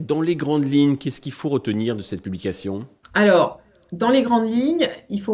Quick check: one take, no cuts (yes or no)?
yes